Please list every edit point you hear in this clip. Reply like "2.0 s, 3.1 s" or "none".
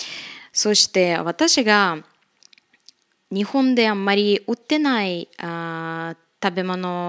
none